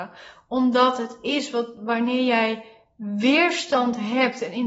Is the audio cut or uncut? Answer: uncut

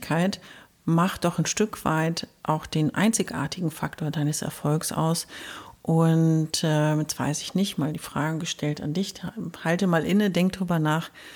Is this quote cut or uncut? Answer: uncut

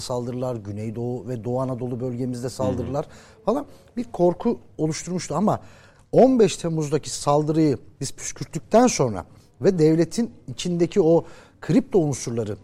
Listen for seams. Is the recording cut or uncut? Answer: uncut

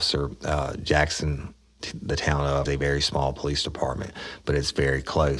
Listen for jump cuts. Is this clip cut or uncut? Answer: cut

